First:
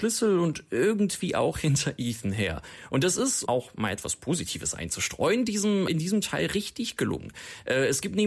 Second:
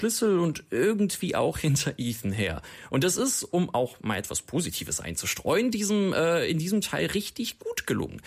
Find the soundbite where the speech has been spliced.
first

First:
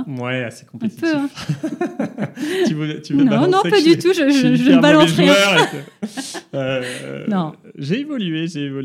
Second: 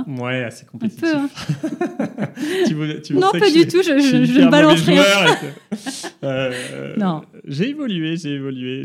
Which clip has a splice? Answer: second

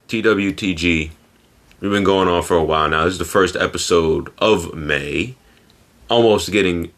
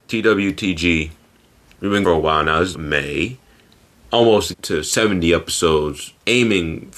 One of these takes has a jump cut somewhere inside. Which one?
second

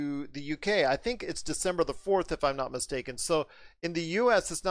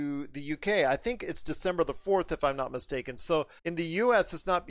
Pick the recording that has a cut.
second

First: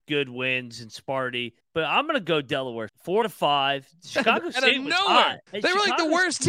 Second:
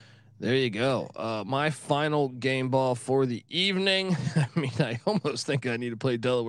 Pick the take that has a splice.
first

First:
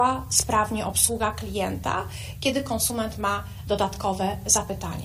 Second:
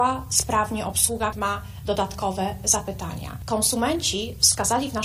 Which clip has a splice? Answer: second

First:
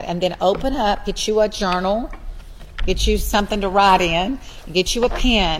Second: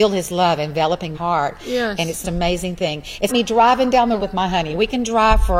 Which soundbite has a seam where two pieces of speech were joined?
second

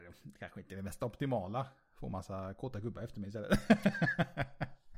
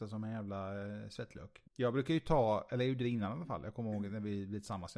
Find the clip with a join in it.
second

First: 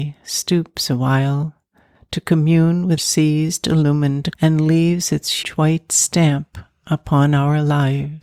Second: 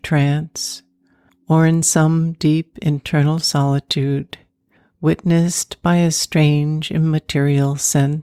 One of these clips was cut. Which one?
first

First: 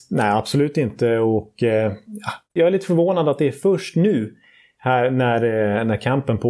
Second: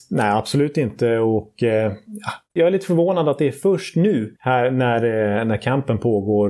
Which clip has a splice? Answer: second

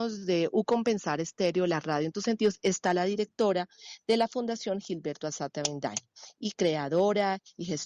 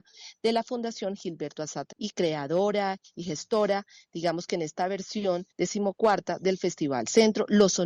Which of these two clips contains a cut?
second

